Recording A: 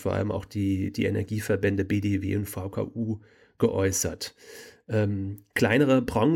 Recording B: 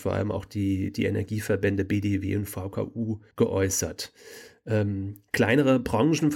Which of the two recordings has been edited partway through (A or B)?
B